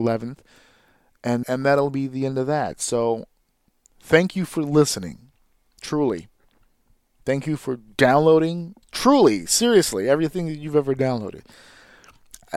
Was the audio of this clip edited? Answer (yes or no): yes